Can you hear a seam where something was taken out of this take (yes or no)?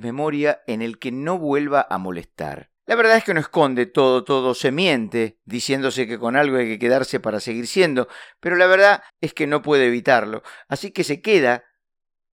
yes